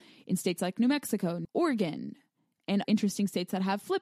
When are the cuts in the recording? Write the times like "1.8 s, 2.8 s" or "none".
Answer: 1.4 s, 2.8 s